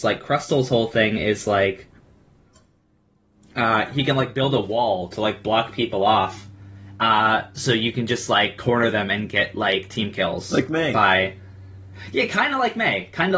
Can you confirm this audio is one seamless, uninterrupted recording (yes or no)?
yes